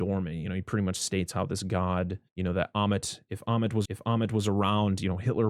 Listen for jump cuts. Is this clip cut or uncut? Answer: cut